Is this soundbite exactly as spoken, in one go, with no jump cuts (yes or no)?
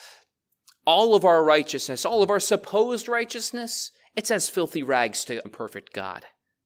no